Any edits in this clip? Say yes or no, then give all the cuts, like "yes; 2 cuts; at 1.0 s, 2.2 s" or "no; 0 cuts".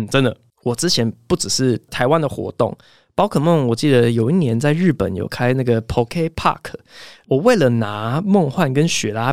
no; 0 cuts